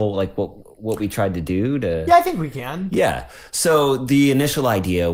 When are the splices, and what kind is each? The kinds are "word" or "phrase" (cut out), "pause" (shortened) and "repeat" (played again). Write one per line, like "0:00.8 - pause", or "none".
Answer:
none